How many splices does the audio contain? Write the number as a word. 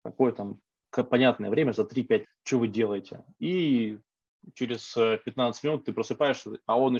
one